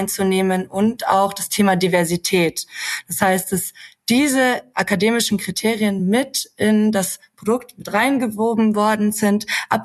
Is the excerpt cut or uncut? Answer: uncut